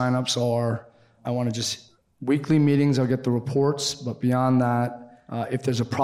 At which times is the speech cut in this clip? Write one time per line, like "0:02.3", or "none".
none

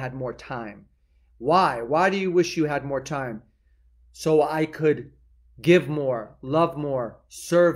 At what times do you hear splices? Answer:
none

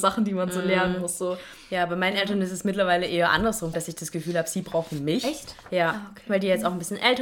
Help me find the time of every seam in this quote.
0:03.7

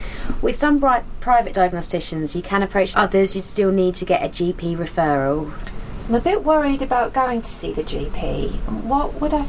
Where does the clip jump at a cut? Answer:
0:02.9

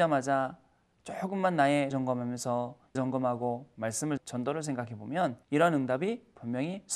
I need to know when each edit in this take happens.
0:01.9
0:03.0
0:04.2
0:05.4

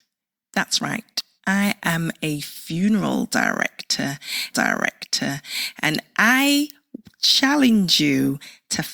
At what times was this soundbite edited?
0:04.5

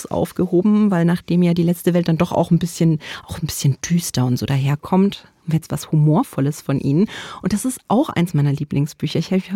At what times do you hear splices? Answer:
none

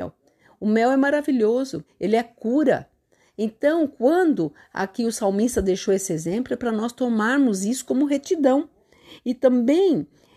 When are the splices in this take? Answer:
0:01.9

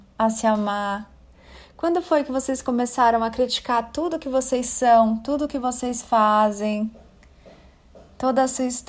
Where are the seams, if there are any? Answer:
none

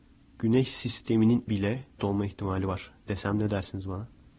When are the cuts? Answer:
0:01.5
0:02.0

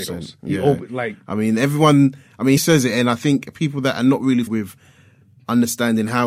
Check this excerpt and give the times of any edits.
0:02.6
0:04.5

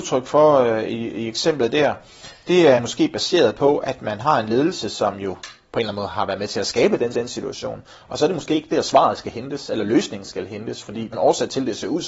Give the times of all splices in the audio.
0:02.8
0:07.1
0:11.1

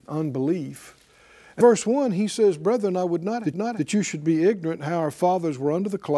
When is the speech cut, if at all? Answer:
0:01.6
0:03.5

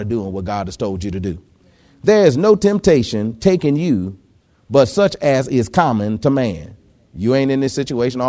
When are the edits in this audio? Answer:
none

